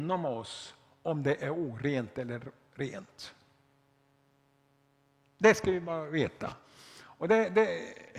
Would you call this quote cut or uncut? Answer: uncut